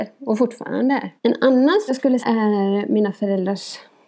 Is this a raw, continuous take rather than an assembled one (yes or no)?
no